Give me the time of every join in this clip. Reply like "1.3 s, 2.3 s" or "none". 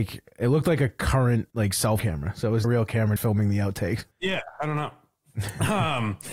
1.5 s, 2.0 s, 2.6 s, 3.2 s, 4.1 s